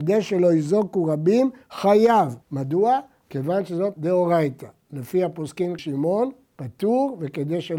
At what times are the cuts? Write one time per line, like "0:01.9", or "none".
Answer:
0:02.4
0:03.9
0:05.8